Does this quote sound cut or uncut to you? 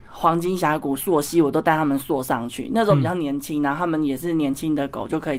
uncut